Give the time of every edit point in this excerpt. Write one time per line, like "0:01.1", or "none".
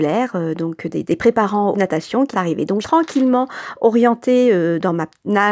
0:01.0
0:01.7
0:02.3
0:02.8